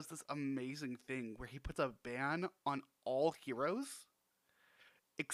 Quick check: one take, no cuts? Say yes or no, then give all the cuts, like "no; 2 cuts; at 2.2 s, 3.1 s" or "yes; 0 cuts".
yes; 0 cuts